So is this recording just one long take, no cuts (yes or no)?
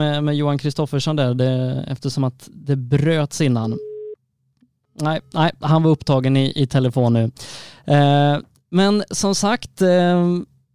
yes